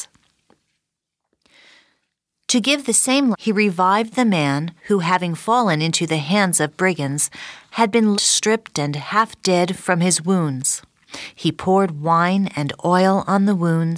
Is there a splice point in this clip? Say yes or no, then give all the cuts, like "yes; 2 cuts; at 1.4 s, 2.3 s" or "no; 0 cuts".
yes; 3 cuts; at 3.3 s, 4.8 s, 8.1 s